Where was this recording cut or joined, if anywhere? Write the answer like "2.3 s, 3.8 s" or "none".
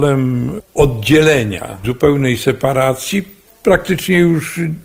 1.8 s